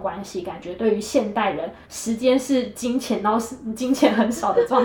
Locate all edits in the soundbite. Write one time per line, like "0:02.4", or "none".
0:01.8